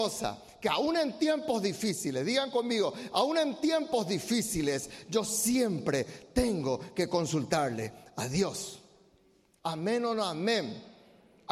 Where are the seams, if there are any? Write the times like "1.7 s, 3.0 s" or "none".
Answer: none